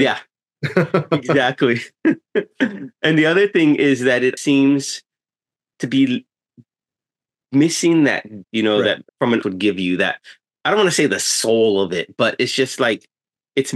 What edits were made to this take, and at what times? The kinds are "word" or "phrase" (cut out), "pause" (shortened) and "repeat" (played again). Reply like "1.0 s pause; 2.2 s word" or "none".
4.4 s word; 8.4 s word; 9.1 s pause; 9.4 s word